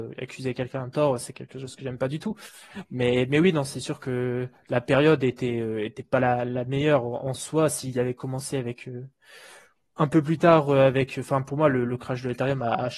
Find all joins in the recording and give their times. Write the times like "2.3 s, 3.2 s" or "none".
none